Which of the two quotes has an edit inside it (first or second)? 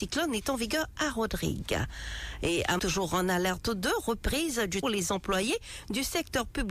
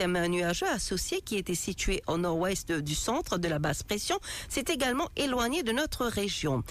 first